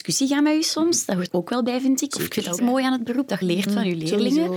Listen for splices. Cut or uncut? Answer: cut